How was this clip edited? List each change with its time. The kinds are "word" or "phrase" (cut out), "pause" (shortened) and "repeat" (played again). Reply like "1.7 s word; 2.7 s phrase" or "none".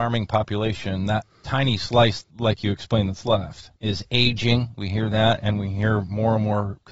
none

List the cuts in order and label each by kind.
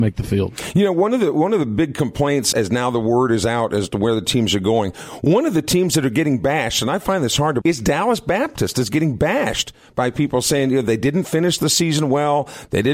2.5 s word; 7.6 s word

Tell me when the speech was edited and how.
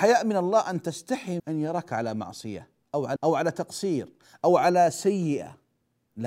1.4 s phrase; 3.2 s word

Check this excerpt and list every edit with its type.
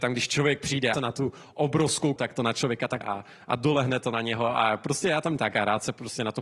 0.9 s phrase; 2.2 s word; 3.0 s word; 5.4 s phrase

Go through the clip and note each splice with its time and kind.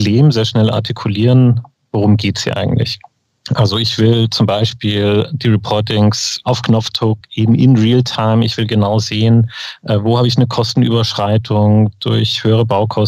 none

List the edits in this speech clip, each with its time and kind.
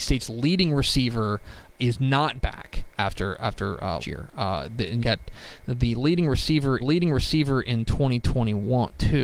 1.8 s word; 3.0 s word; 4.0 s word; 5.0 s phrase; 6.8 s repeat

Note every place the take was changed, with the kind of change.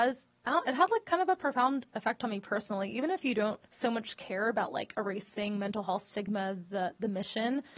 3.7 s pause

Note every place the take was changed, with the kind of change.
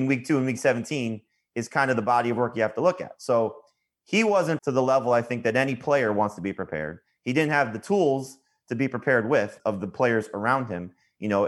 4.6 s word; 9.6 s word

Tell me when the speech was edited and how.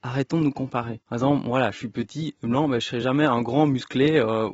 none

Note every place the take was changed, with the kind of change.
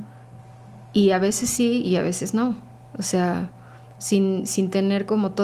none

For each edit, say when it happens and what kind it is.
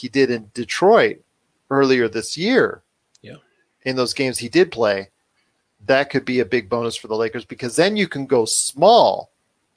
none

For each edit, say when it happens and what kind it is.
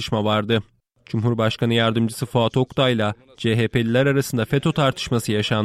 none

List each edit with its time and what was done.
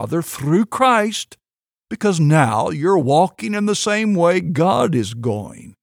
none

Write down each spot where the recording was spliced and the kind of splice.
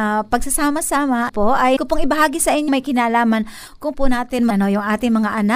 1.3 s word; 1.8 s word; 2.7 s word; 3.9 s word; 4.5 s word

